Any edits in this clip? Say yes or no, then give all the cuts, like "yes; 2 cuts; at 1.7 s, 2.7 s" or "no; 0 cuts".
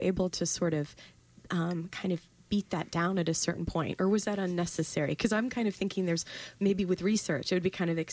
no; 0 cuts